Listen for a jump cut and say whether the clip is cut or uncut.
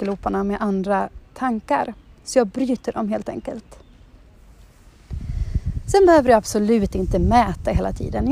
uncut